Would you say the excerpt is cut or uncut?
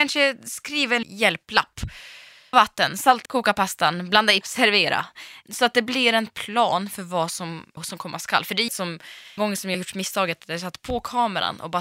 cut